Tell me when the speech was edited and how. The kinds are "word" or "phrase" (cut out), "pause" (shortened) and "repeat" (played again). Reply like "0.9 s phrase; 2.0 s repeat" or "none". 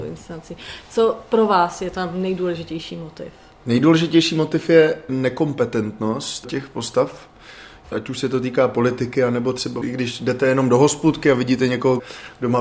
none

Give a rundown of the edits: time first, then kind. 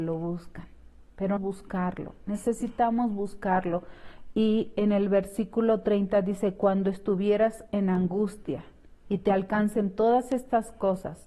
1.4 s word; 9.0 s pause

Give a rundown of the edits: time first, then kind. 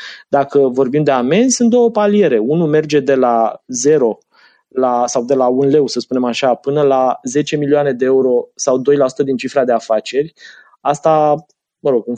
none

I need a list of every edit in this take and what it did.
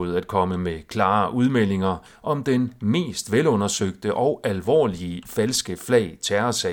none

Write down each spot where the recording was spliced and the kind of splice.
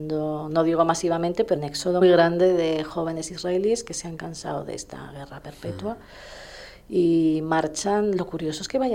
1.6 s word; 2.0 s word

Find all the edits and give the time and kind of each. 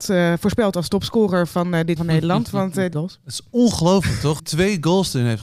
2.0 s word; 2.9 s phrase; 4.4 s phrase

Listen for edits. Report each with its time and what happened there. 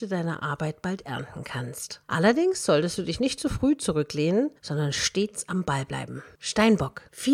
4.6 s pause

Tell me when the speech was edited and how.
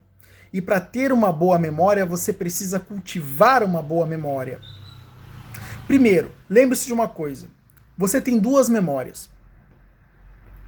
6.4 s pause

